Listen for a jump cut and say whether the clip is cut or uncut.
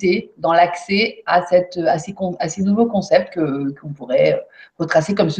uncut